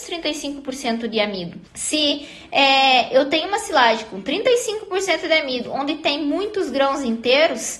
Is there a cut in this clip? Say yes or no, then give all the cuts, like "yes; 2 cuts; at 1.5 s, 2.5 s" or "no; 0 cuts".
yes; 1 cut; at 1.7 s